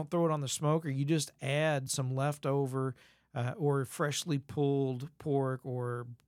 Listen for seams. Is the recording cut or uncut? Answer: uncut